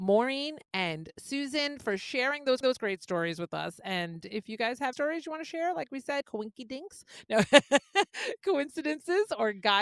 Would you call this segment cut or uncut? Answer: cut